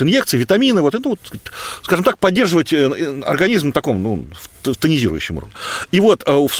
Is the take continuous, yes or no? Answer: no